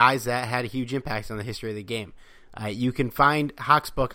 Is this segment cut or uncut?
uncut